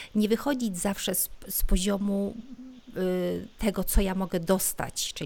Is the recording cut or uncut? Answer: uncut